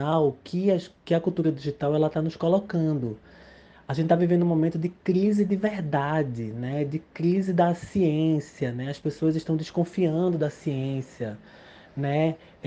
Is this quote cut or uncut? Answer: uncut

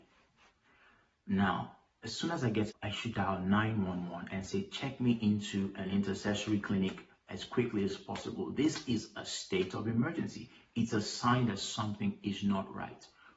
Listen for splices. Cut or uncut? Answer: cut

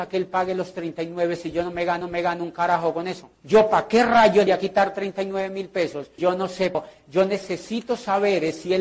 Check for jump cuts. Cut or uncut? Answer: cut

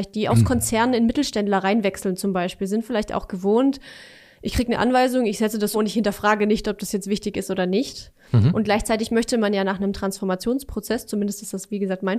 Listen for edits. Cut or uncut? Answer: cut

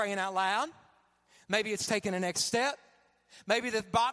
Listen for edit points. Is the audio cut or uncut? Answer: uncut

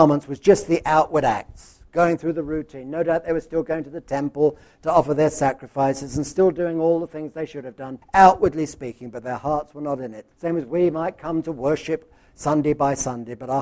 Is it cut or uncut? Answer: cut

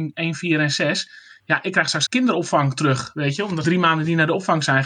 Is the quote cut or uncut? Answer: cut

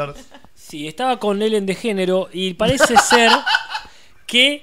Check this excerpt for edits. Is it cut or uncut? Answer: uncut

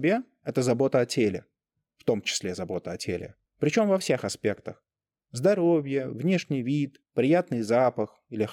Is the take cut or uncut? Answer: cut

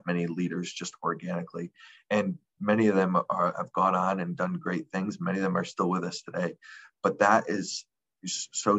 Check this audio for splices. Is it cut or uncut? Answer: uncut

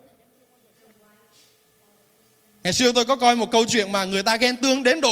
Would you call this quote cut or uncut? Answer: uncut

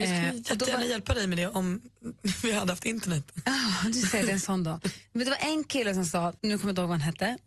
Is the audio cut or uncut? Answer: cut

